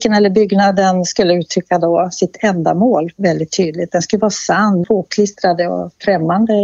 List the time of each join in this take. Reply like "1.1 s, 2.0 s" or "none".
4.8 s

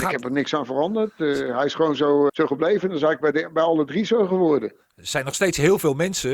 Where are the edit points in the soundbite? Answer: 2.3 s

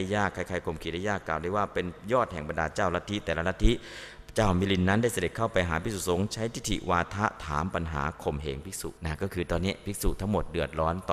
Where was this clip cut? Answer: 9.0 s

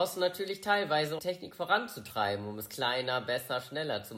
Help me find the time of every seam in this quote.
1.2 s

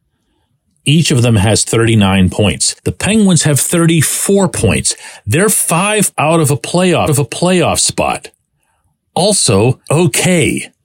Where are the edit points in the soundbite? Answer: 2.8 s, 6.1 s, 7.1 s, 9.9 s

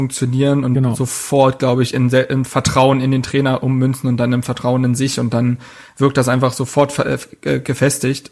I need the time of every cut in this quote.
none

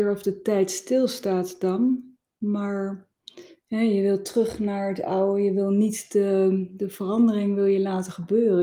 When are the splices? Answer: none

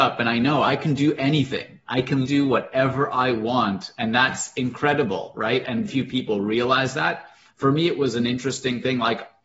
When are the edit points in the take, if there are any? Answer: 2.2 s, 5.9 s

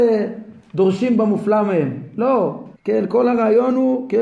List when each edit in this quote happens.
2.7 s

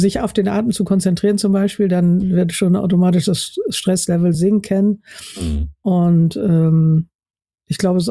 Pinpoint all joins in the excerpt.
none

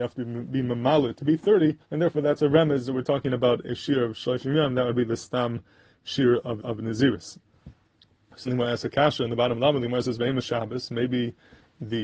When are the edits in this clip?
1.8 s, 6.6 s, 8.5 s

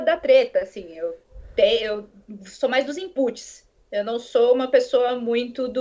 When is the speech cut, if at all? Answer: none

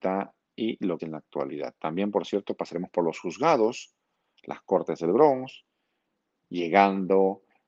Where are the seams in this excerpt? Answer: 1.0 s

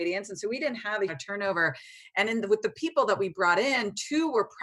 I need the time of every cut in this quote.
1.1 s

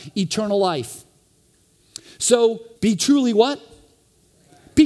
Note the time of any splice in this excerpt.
2.8 s

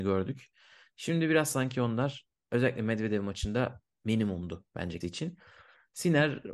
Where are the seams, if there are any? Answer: 5.0 s

